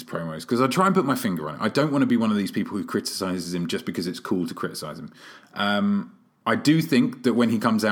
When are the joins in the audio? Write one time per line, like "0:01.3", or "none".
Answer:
none

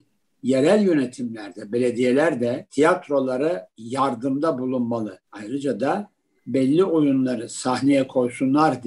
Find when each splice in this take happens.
none

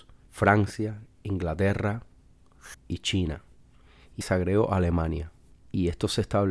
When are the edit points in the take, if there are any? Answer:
0:02.7
0:04.2

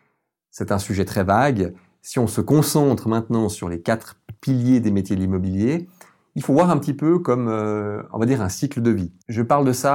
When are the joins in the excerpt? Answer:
none

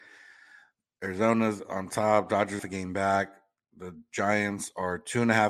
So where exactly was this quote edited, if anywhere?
0:02.6

